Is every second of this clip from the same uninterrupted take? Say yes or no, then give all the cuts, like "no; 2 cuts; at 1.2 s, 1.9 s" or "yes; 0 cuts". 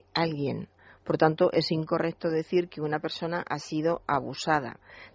yes; 0 cuts